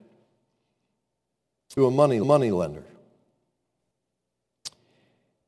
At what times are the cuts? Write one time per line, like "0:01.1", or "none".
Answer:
0:01.8
0:02.2